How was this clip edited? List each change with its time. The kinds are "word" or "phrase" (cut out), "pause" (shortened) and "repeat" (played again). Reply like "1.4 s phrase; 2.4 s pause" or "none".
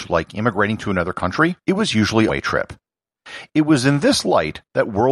1.6 s pause; 2.3 s phrase